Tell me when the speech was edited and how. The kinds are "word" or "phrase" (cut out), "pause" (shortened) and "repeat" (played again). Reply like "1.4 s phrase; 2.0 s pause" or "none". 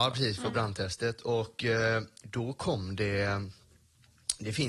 none